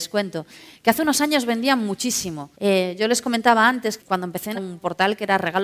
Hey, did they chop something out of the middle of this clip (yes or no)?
yes